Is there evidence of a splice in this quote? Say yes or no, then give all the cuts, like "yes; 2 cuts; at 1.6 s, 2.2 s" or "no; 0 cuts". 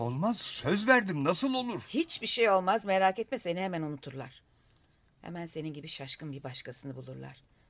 no; 0 cuts